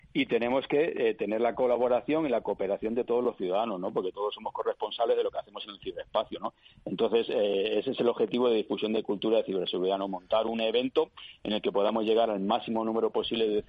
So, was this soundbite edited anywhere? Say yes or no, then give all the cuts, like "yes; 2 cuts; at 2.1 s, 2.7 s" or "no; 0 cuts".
no; 0 cuts